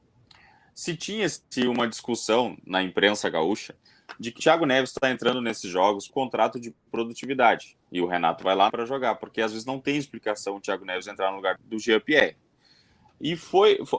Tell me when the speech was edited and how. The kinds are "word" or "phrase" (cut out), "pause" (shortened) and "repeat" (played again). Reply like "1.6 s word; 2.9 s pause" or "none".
4.4 s word; 6.1 s word; 7.8 s pause; 8.7 s phrase; 11.6 s word